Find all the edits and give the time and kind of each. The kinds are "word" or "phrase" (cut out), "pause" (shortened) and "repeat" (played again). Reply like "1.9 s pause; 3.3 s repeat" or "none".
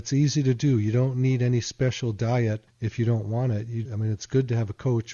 2.7 s pause; 3.8 s word